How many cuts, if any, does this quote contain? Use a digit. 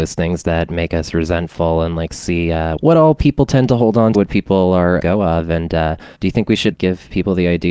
5